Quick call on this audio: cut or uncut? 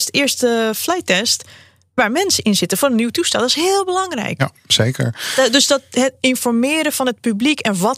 uncut